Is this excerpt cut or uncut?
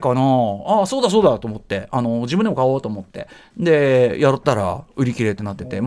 uncut